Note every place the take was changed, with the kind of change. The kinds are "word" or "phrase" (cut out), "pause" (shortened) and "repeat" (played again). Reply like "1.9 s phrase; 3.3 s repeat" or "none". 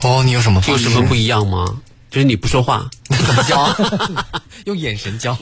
3.0 s pause